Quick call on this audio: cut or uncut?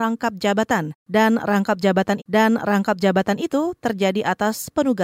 cut